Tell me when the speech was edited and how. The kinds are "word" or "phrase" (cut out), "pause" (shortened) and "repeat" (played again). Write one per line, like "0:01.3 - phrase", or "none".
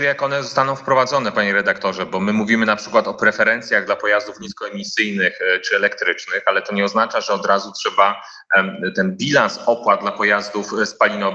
none

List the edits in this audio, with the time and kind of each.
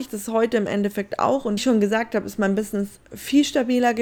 0:01.6 - phrase

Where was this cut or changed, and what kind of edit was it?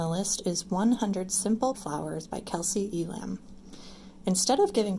0:01.7 - word

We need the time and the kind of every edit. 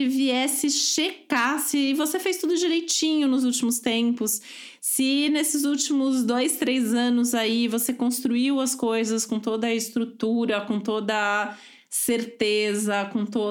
none

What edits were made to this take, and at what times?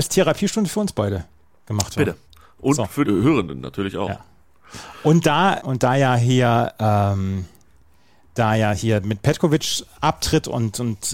0:03.0 - word
0:05.6 - word

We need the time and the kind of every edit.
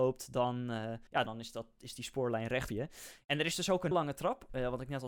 0:01.1 - pause
0:02.7 - word
0:03.9 - word

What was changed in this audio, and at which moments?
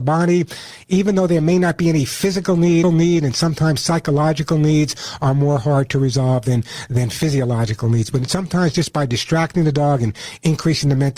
0:02.8 - phrase

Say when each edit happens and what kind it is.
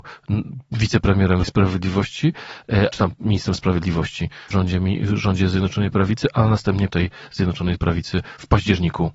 0:01.4 - phrase
0:02.9 - word
0:04.5 - word
0:06.9 - word

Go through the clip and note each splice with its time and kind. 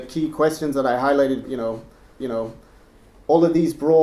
0:01.4 - word
0:02.2 - repeat

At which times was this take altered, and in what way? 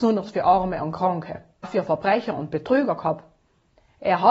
0:01.6 - word

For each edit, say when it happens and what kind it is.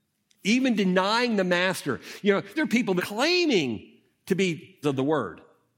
0:02.6 - word
0:03.0 - phrase
0:04.8 - word

